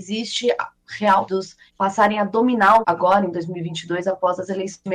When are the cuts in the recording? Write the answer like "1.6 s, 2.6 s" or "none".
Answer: 1.3 s, 1.7 s, 2.8 s